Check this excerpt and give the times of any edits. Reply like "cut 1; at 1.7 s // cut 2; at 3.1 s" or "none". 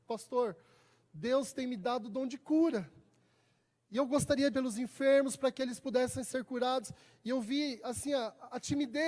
cut 1; at 4.5 s